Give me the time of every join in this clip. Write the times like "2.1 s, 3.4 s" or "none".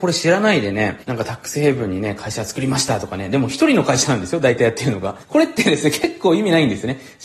1.0 s, 5.2 s

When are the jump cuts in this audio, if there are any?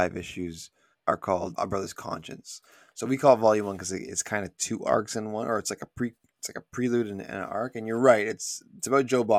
0.9 s, 1.6 s

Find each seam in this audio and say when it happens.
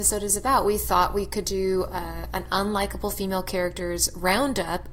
none

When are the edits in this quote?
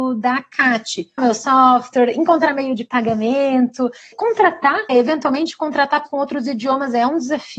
1.2 s, 4.1 s, 4.9 s, 6.1 s

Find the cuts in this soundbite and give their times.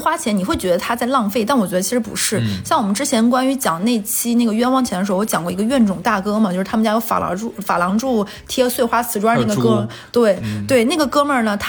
none

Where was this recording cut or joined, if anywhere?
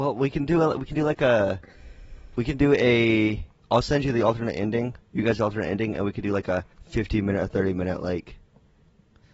3.6 s, 5.0 s, 6.7 s

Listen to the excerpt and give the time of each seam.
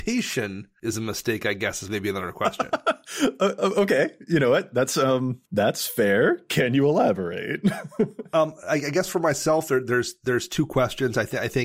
5.5 s

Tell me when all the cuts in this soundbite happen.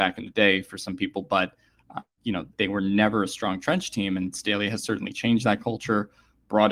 2.2 s, 2.6 s, 4.3 s

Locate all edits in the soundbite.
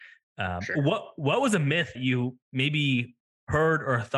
1.9 s, 2.4 s

